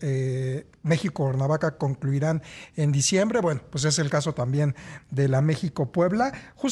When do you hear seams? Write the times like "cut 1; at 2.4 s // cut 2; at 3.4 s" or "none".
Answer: none